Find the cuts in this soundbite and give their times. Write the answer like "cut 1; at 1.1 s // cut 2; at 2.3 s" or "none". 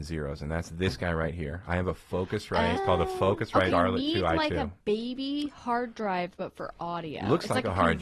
cut 1; at 2.8 s // cut 2; at 3.7 s